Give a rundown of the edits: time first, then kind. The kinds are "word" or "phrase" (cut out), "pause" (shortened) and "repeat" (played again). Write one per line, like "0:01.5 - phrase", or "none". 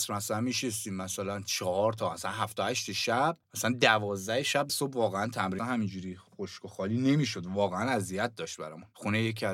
0:03.4 - pause
0:04.7 - phrase
0:05.6 - phrase
0:06.3 - pause